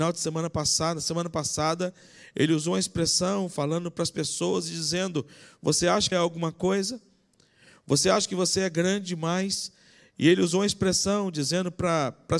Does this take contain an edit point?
yes; 1 cut; at 6.1 s

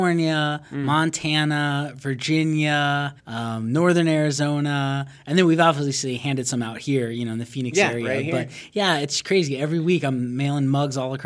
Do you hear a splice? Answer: yes; 1 cut; at 3.2 s

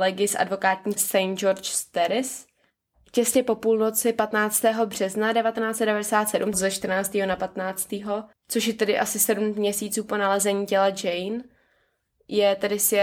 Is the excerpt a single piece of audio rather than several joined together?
no; 3 cuts; at 1.0 s, 6.5 s, 8.3 s

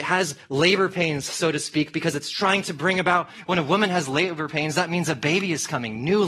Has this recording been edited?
no; 0 cuts

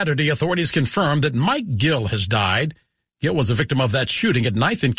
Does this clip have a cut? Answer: no; 0 cuts

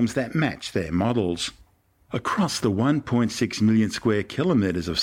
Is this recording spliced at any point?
no; 0 cuts

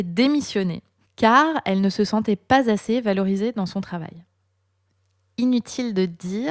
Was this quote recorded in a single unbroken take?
no; 1 cut; at 1.0 s

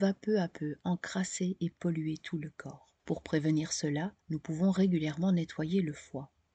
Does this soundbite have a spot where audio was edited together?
yes; 2 cuts; at 3.0 s, 4.2 s

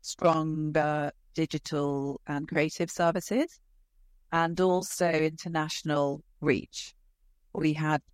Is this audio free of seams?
yes; 0 cuts

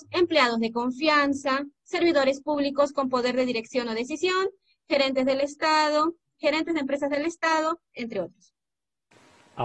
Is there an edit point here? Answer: no; 0 cuts

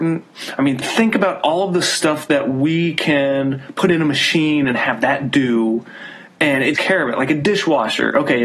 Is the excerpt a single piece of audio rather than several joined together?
no; 1 cut; at 6.7 s

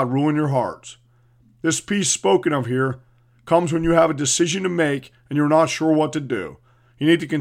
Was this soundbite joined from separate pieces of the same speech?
no; 0 cuts

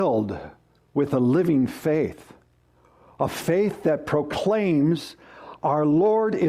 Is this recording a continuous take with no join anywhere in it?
yes; 0 cuts

